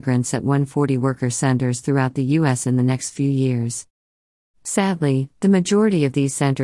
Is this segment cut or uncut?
uncut